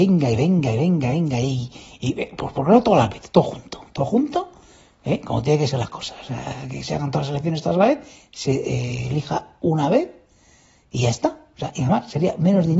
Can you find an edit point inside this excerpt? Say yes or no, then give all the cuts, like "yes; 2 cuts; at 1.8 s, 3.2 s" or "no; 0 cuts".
no; 0 cuts